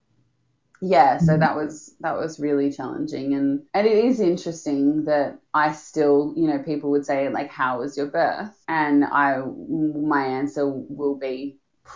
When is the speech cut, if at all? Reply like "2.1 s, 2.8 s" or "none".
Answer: 3.7 s, 5.4 s, 8.6 s